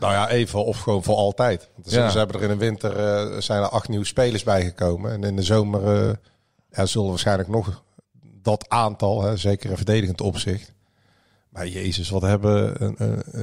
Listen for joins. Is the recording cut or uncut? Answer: uncut